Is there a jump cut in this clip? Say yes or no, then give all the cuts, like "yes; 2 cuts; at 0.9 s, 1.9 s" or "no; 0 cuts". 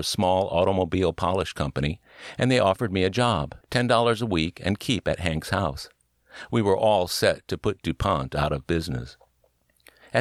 yes; 1 cut; at 3.6 s